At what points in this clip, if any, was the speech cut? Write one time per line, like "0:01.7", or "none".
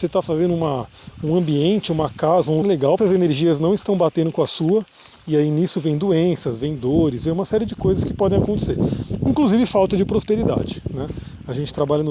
0:02.6
0:03.0